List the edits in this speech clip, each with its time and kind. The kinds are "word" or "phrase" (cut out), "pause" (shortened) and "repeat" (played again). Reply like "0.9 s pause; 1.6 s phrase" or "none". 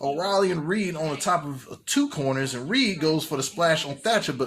none